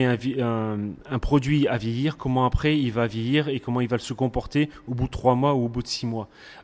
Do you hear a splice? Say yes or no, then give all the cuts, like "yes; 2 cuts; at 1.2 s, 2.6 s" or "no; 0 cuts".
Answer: no; 0 cuts